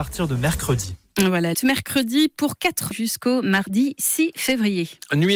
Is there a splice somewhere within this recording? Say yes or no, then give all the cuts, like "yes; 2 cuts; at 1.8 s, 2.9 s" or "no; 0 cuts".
yes; 2 cuts; at 1.5 s, 2.9 s